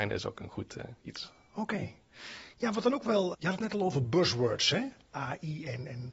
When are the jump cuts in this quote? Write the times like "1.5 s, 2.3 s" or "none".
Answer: 3.3 s